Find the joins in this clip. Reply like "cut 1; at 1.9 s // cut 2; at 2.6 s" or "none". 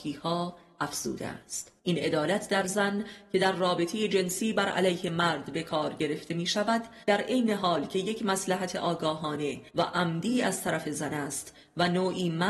cut 1; at 1.8 s // cut 2; at 7.0 s // cut 3; at 9.7 s